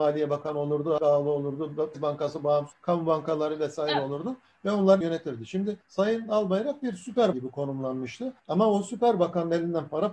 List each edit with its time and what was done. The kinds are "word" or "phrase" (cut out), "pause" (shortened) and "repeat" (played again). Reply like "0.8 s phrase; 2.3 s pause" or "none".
1.0 s word; 1.9 s word; 2.7 s word; 5.0 s word; 5.8 s pause; 7.3 s word; 8.4 s pause